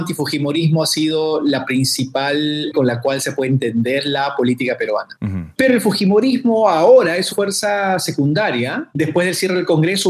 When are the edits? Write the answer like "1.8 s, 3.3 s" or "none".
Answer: 2.7 s, 7.3 s